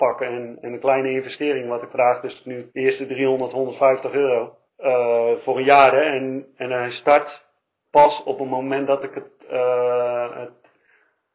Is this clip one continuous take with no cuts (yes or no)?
no